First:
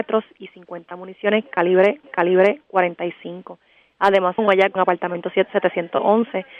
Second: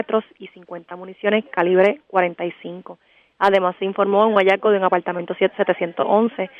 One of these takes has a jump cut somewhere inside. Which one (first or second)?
first